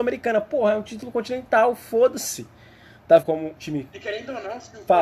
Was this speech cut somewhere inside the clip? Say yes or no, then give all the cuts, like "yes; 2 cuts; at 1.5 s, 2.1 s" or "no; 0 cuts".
yes; 2 cuts; at 3.2 s, 3.6 s